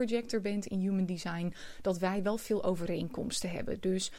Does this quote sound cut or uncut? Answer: uncut